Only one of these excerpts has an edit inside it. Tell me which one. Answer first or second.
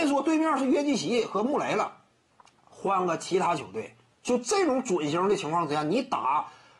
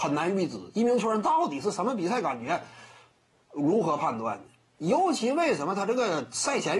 first